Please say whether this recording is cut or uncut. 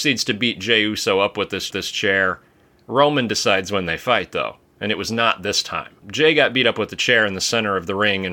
cut